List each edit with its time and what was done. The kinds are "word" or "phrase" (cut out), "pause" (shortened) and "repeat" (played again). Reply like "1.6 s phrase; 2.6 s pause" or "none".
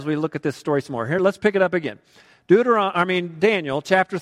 none